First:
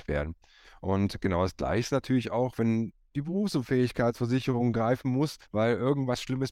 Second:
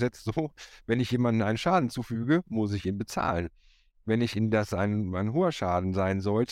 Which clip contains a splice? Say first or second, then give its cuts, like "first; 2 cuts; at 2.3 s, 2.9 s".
first; 1 cut; at 5.4 s